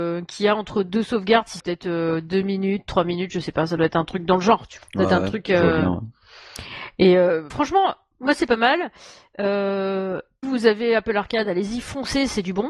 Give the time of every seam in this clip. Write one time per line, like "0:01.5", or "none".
0:01.6
0:04.8
0:07.5
0:10.4